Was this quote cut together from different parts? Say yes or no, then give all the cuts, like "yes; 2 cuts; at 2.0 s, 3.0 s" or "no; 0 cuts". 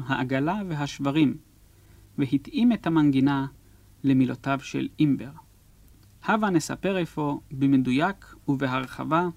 no; 0 cuts